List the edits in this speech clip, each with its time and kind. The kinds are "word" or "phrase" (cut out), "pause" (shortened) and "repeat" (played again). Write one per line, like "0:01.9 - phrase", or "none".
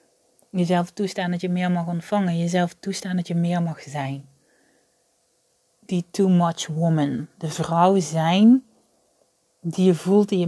none